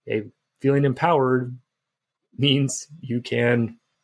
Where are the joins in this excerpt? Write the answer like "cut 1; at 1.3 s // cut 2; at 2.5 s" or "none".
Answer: none